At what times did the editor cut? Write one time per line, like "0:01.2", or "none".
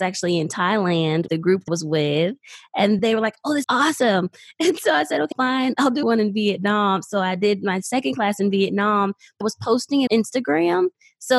0:01.3
0:01.7
0:03.0
0:03.6
0:05.3
0:06.0
0:09.4
0:10.1